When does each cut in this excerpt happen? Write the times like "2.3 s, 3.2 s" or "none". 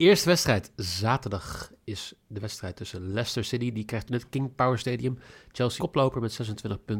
4.1 s, 5.8 s